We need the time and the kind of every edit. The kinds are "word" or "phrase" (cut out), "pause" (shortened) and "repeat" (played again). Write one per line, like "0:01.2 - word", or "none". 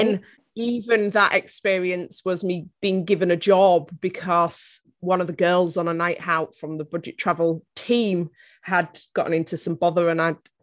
none